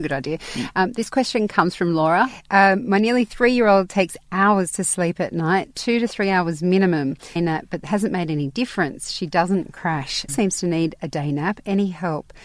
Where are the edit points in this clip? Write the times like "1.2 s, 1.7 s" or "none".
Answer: 7.4 s, 10.3 s